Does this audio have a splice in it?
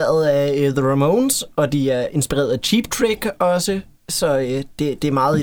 no; 0 cuts

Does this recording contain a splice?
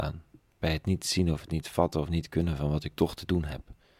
no; 0 cuts

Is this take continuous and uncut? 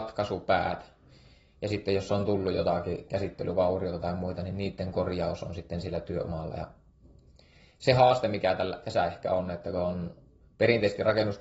yes; 0 cuts

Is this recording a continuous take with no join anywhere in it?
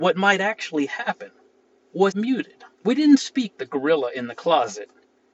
no; 3 cuts; at 2.1 s, 2.7 s, 3.5 s

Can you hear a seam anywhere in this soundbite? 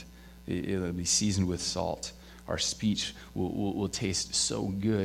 no; 0 cuts

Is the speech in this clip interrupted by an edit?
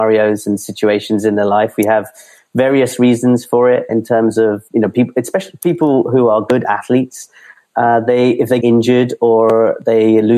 yes; 3 cuts; at 3.9 s, 4.7 s, 8.6 s

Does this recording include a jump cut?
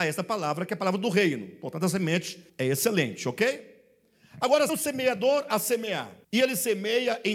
yes; 3 cuts; at 2.5 s, 4.7 s, 6.2 s

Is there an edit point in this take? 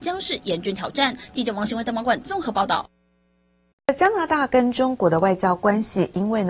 no; 0 cuts

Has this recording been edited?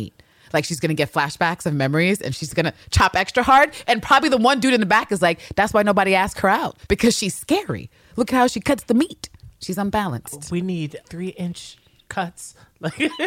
yes; 1 cut; at 11.0 s

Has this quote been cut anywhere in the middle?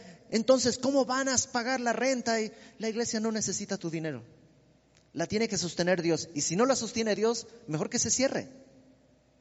no; 0 cuts

